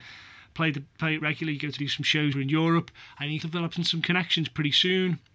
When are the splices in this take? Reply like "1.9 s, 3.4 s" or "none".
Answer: 1.2 s, 1.8 s, 2.3 s, 3.4 s